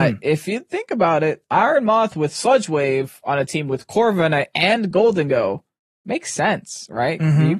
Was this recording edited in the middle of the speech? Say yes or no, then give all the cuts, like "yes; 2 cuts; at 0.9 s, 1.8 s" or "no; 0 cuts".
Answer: no; 0 cuts